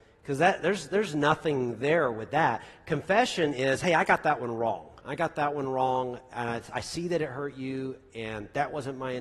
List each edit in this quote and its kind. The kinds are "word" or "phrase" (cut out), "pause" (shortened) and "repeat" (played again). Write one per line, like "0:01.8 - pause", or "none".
0:05.0 - pause